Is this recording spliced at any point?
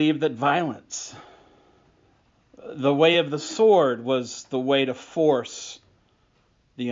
no; 0 cuts

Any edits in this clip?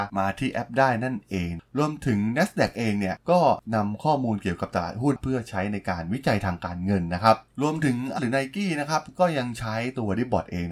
yes; 1 cut; at 8.2 s

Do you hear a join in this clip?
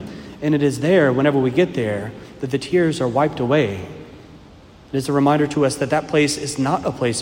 no; 0 cuts

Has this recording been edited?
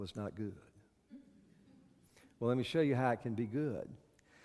no; 0 cuts

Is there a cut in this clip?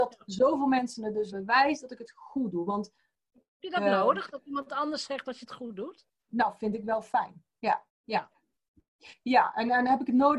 yes; 2 cuts; at 1.3 s, 7.9 s

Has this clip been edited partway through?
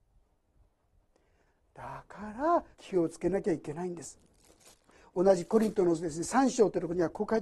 yes; 1 cut; at 2.7 s

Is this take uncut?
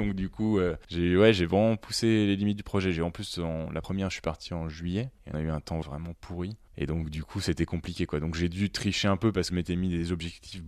no; 3 cuts; at 5.3 s, 5.8 s, 9.5 s

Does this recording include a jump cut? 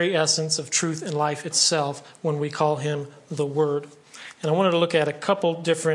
no; 0 cuts

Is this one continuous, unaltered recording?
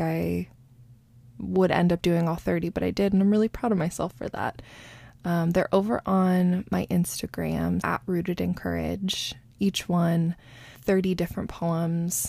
no; 2 cuts; at 7.8 s, 10.8 s

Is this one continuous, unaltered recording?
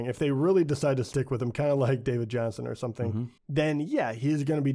no; 1 cut; at 3.4 s

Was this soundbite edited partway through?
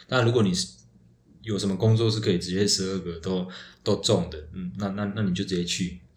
no; 0 cuts

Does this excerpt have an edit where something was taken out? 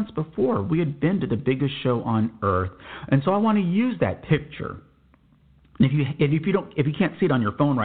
no; 0 cuts

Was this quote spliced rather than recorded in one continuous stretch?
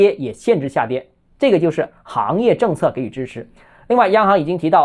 no; 0 cuts

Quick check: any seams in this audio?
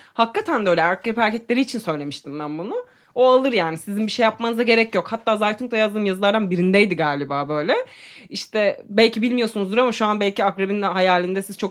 no; 0 cuts

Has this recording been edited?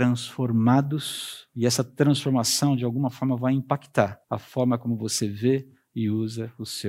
yes; 1 cut; at 4.2 s

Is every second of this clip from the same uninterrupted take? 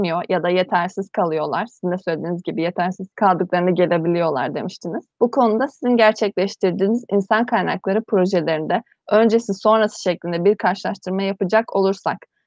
no; 2 cuts; at 3.1 s, 5.1 s

